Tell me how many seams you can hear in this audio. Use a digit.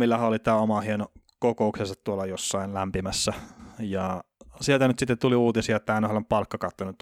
0